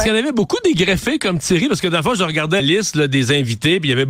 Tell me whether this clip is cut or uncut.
cut